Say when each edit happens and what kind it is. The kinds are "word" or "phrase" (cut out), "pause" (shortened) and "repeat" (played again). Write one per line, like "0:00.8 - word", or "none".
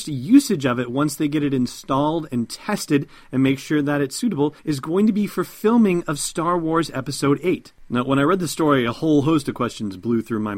0:04.6 - pause